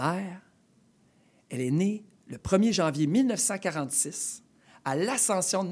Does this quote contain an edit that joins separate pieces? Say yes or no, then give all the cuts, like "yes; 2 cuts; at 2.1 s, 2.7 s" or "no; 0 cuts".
no; 0 cuts